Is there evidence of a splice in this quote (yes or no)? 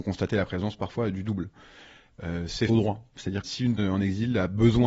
yes